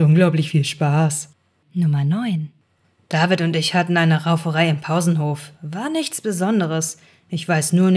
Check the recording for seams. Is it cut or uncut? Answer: uncut